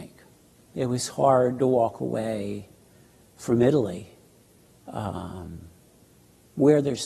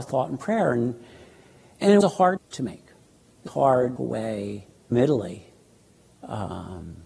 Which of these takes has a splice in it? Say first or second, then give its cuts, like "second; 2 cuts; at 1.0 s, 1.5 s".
second; 5 cuts; at 2.0 s, 2.4 s, 3.5 s, 4.0 s, 4.9 s